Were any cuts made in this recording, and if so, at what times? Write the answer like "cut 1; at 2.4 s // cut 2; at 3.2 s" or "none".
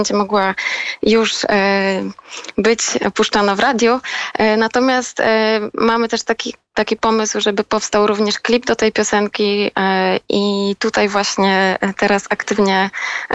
none